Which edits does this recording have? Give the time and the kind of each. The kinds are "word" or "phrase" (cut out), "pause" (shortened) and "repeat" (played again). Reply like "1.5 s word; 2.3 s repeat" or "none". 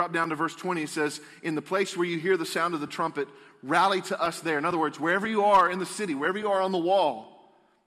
none